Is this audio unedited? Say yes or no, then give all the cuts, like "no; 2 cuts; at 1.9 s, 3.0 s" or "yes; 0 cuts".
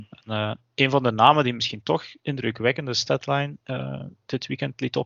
yes; 0 cuts